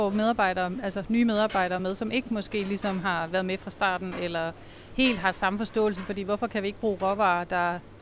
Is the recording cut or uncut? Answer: uncut